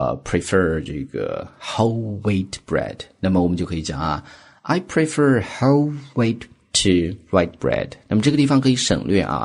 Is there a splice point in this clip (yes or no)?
no